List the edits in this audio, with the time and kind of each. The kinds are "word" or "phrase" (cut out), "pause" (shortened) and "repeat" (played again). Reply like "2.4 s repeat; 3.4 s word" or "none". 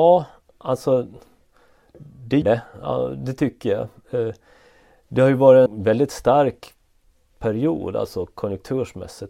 2.4 s word; 5.7 s word